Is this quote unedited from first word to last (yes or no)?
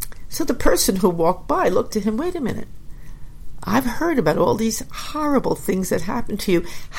no